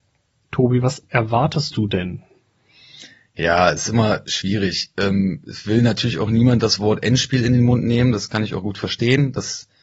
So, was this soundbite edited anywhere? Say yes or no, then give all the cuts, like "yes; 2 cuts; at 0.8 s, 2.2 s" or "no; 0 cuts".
no; 0 cuts